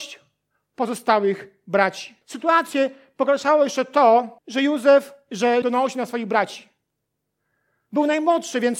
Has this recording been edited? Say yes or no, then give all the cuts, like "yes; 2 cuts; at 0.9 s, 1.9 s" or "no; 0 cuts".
yes; 3 cuts; at 2.2 s, 4.4 s, 5.6 s